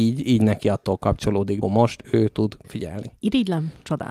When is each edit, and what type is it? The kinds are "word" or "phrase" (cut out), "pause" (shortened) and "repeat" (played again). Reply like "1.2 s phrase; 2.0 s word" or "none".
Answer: 1.6 s phrase; 2.6 s word